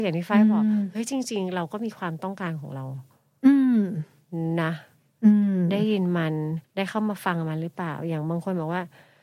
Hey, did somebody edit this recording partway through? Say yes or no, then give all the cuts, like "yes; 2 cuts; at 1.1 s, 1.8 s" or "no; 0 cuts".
yes; 1 cut; at 6.6 s